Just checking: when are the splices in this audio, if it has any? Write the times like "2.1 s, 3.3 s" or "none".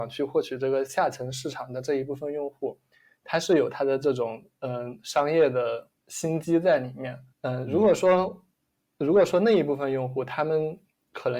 6.0 s, 7.3 s

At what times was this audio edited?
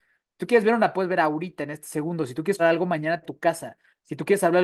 0.9 s, 2.6 s, 3.2 s

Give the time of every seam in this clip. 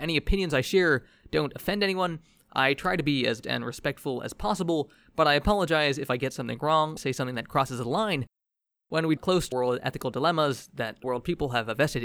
3.4 s, 7.0 s, 9.2 s, 9.5 s, 11.0 s

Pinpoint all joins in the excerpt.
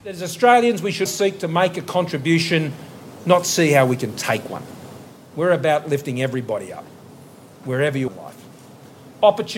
1.1 s, 8.1 s

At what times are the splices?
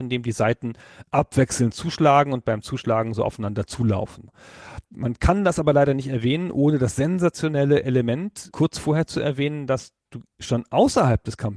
none

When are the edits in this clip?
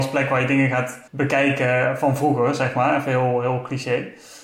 1.1 s

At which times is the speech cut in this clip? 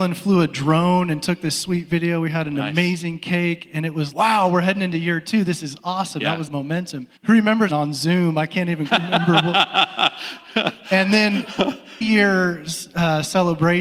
4.1 s, 6.5 s, 7.2 s, 7.7 s, 8.9 s, 12.0 s

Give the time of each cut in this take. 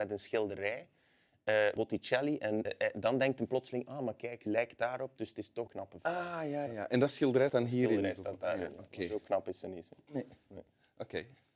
1.8 s, 2.6 s, 4.5 s, 5.7 s, 6.7 s, 7.5 s

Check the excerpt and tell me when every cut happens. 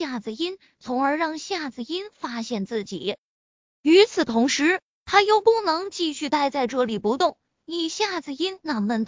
3.5 s

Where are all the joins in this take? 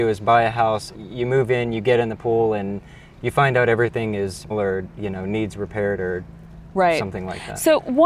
0.9 s, 4.5 s

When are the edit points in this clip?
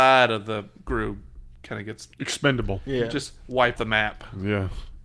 2.1 s, 3.8 s

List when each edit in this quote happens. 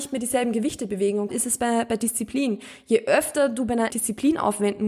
1.3 s, 3.9 s

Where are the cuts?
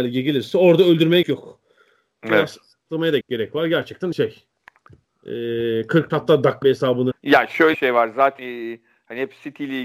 1.2 s, 3.2 s, 4.1 s, 6.1 s, 6.6 s, 7.1 s, 7.7 s, 8.4 s

